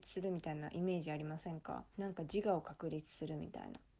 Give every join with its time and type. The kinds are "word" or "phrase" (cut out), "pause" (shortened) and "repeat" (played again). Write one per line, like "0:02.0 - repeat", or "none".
0:01.9 - pause